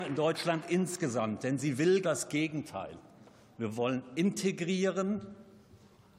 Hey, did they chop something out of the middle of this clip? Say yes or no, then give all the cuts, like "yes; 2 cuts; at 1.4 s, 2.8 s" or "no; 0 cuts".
yes; 1 cut; at 2.0 s